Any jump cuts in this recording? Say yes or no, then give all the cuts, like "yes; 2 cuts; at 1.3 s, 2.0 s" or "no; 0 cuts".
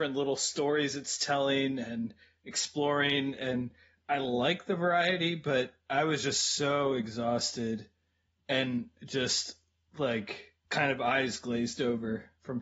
yes; 1 cut; at 10.6 s